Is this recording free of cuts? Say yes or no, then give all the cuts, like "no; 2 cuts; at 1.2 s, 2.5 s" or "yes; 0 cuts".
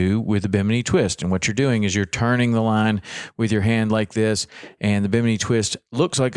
yes; 0 cuts